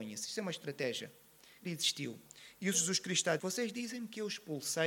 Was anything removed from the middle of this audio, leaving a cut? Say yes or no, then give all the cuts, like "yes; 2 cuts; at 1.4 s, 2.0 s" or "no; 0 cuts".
yes; 3 cuts; at 1.6 s, 2.7 s, 3.4 s